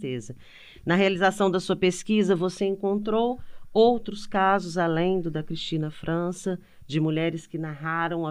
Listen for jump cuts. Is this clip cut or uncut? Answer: uncut